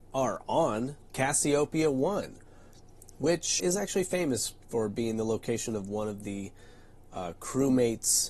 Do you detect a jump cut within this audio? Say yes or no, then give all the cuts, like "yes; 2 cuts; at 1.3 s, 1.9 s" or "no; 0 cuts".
yes; 1 cut; at 3.6 s